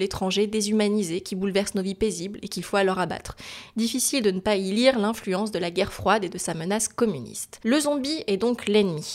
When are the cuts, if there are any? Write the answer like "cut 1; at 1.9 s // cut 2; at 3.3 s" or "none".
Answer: none

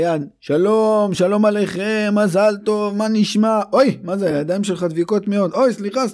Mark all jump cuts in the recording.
none

